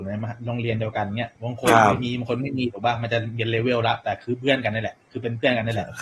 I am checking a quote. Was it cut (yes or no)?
yes